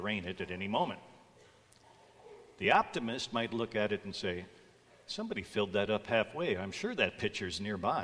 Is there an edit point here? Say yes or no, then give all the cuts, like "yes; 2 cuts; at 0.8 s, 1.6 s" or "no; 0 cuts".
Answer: no; 0 cuts